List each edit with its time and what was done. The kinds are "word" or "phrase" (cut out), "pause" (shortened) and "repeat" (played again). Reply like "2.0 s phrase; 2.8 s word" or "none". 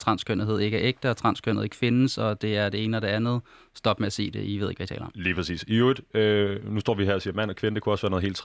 none